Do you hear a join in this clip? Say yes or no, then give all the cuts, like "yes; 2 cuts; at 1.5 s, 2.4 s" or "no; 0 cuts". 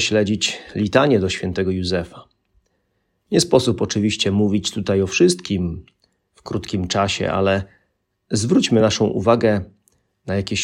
no; 0 cuts